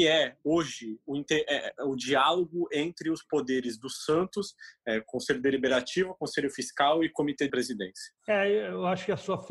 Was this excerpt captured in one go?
no; 2 cuts; at 7.5 s, 8.2 s

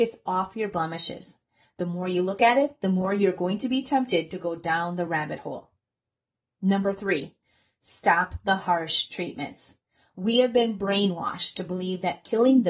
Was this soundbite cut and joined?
no; 0 cuts

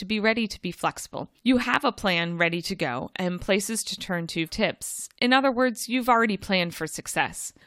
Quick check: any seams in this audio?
yes; 2 cuts; at 1.4 s, 4.5 s

